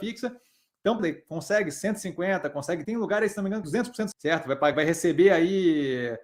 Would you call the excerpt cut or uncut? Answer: cut